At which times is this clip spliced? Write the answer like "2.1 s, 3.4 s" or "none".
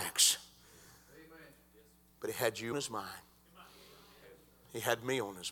2.7 s